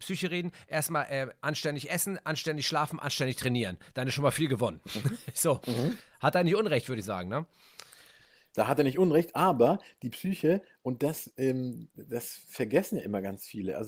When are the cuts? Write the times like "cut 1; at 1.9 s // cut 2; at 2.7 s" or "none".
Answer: none

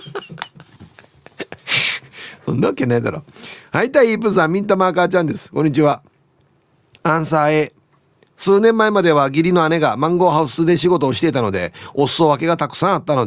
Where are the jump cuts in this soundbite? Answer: none

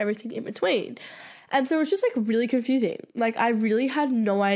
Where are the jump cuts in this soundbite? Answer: cut 1; at 3.1 s

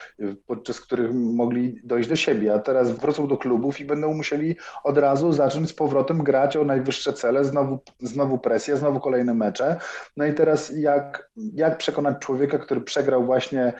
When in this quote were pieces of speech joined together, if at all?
none

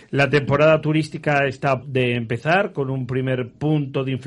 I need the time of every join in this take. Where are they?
cut 1; at 1.8 s

